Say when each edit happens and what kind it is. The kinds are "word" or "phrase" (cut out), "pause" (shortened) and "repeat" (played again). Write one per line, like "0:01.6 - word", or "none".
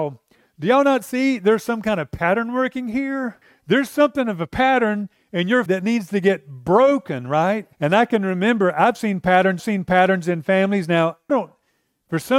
0:03.4 - pause
0:05.7 - word
0:07.7 - pause
0:09.6 - repeat
0:11.3 - word

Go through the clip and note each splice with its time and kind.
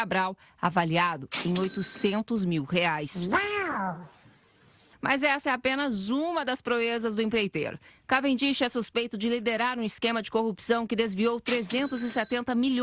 none

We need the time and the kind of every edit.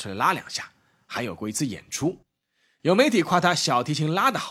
none

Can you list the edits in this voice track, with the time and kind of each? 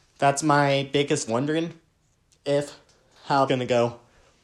0:01.3 - phrase
0:03.5 - word

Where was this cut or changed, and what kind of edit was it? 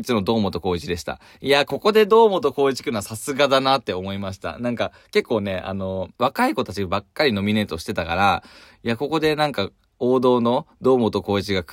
0:06.2 - pause

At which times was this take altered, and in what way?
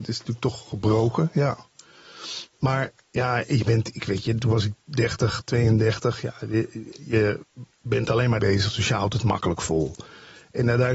0:02.5 - pause
0:07.7 - pause
0:08.4 - word

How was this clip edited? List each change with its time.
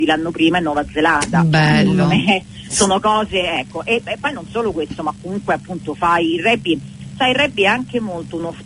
none

